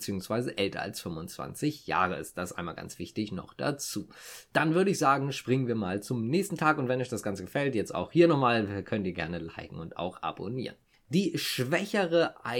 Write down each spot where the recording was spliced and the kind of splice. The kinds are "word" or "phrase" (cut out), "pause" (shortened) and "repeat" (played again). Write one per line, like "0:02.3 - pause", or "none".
none